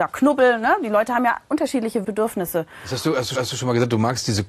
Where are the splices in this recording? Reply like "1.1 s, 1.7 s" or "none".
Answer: 2.0 s, 3.4 s